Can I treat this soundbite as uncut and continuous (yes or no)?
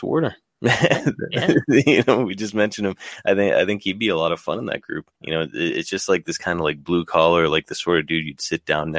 no